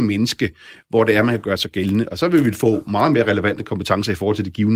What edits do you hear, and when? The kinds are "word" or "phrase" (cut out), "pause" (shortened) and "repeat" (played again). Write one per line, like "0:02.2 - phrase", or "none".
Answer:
none

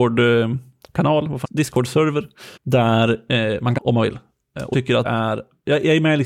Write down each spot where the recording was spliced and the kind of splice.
0:01.4 - word
0:02.6 - pause
0:03.8 - word
0:04.7 - word
0:05.0 - word

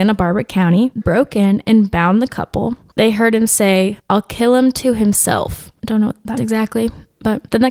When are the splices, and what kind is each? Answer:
0:01.0 - word
0:04.0 - pause
0:06.4 - word

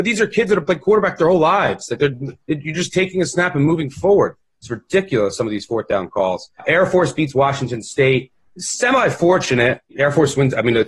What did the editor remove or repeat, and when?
none

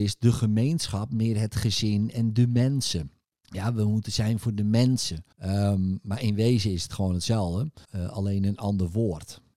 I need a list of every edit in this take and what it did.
0:03.3 - pause
0:05.3 - pause
0:07.8 - pause

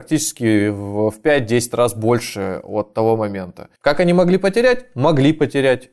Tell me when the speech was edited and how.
0:03.8 - pause

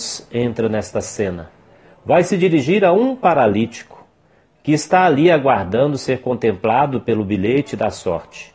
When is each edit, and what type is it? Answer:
none

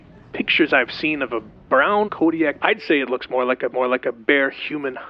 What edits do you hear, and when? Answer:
0:02.0 - word
0:02.6 - word
0:03.7 - repeat

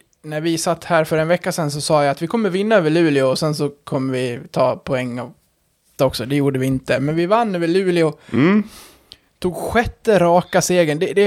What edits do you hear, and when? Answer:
0:06.0 - word

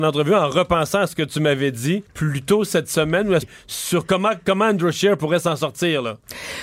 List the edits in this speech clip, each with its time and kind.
0:02.1 - pause
0:03.4 - phrase

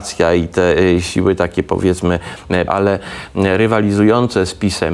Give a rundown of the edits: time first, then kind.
0:02.7 - word

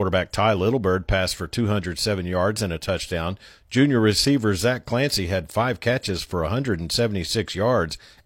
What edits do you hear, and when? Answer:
none

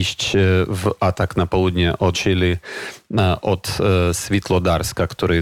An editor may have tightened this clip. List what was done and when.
0:02.1 - word

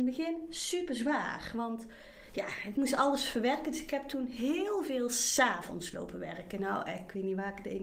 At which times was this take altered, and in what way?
none

